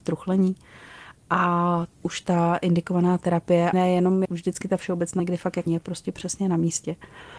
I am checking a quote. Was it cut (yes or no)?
yes